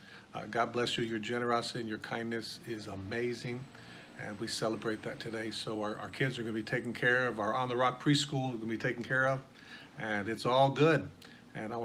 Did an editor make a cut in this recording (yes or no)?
no